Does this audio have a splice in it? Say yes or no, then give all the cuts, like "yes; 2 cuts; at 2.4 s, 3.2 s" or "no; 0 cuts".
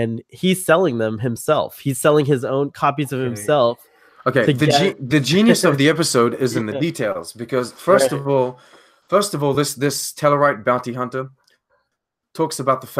no; 0 cuts